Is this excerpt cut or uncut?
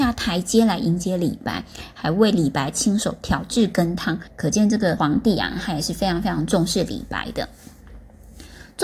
cut